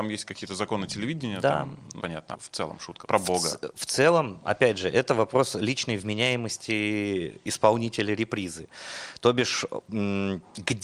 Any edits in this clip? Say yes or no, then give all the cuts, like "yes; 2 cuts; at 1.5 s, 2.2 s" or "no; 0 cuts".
yes; 4 cuts; at 2.0 s, 2.3 s, 3.0 s, 4.4 s